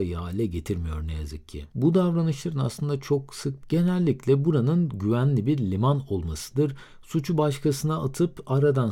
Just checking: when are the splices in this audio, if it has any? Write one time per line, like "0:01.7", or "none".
0:03.6